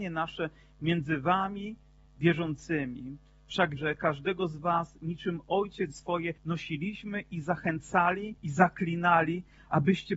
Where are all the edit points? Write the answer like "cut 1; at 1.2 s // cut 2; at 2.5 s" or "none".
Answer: cut 1; at 3.8 s // cut 2; at 5.9 s // cut 3; at 6.4 s // cut 4; at 8.4 s